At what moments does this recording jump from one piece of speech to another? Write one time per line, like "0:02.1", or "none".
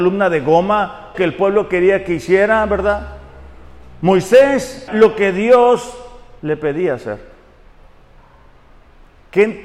0:01.1
0:04.9
0:06.4